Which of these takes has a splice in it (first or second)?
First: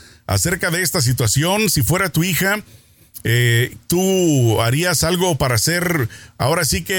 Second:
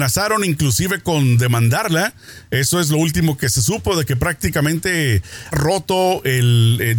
second